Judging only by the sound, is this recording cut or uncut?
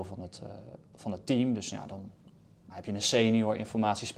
cut